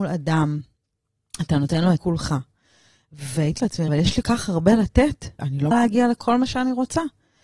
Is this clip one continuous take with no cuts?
no; 6 cuts; at 2.0 s, 3.6 s, 3.9 s, 4.2 s, 5.4 s, 5.7 s

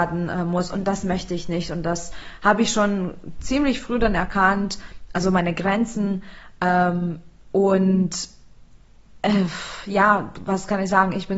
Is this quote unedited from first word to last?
yes; 0 cuts

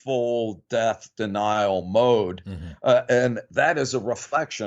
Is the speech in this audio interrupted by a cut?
no; 0 cuts

